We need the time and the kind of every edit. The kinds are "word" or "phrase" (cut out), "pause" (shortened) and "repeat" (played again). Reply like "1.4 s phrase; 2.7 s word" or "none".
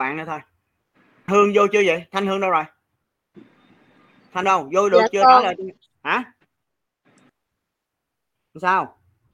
1.3 s word; 4.4 s word